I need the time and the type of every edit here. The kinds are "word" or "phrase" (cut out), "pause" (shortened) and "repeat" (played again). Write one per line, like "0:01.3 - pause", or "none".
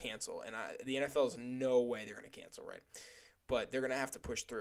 none